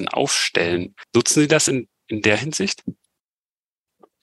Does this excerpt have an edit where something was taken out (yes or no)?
no